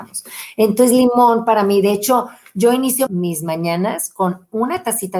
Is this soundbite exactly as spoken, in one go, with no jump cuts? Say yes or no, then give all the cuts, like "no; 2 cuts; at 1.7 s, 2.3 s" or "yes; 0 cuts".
no; 1 cut; at 3.1 s